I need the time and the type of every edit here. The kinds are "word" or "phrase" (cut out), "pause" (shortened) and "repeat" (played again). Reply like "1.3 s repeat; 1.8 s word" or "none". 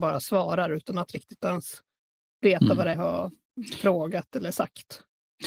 2.9 s phrase